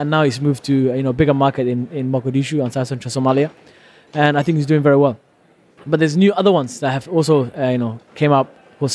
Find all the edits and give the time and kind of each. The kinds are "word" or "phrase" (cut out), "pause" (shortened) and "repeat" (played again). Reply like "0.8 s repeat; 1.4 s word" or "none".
none